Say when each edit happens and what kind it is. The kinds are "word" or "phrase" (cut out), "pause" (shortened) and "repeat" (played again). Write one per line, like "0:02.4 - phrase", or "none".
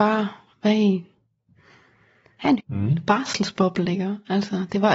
0:02.6 - word